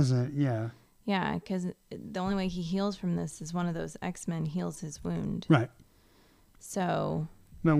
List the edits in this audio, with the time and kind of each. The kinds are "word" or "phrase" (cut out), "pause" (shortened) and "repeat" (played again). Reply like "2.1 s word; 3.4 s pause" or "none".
none